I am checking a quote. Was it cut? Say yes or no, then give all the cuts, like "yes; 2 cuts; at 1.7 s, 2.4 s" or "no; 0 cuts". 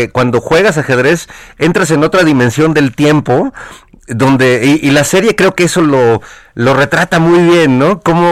no; 0 cuts